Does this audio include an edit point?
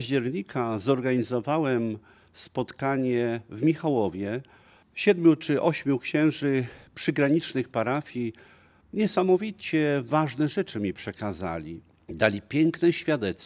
no; 0 cuts

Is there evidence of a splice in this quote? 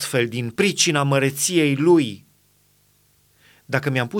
no; 0 cuts

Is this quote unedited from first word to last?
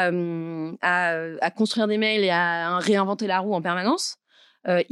yes; 0 cuts

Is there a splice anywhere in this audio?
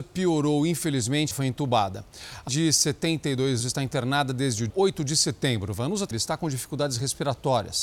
yes; 5 cuts; at 1.3 s, 2.5 s, 3.6 s, 4.7 s, 6.1 s

